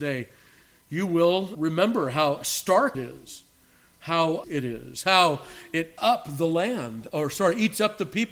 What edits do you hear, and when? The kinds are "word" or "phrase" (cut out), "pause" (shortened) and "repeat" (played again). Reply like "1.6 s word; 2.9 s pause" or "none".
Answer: 1.5 s word; 2.9 s word; 4.4 s word; 6.0 s word

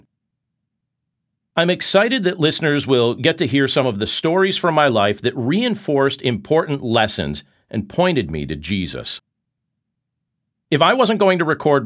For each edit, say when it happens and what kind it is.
none

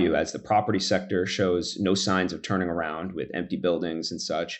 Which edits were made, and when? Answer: none

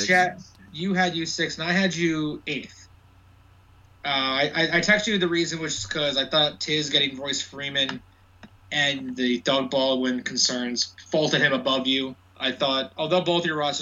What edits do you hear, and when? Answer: none

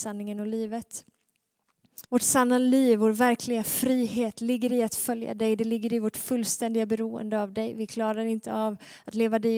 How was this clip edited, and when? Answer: 2.0 s pause

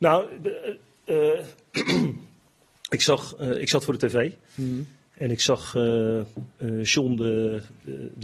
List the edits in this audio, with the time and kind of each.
none

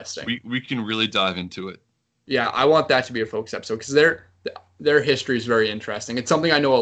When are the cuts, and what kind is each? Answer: none

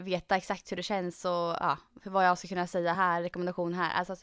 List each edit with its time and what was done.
none

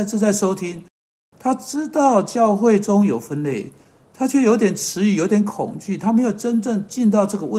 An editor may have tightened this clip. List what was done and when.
none

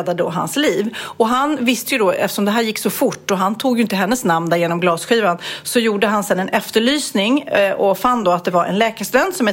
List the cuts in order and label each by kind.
none

